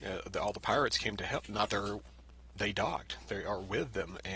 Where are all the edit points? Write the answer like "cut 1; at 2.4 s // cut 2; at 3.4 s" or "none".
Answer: cut 1; at 1.7 s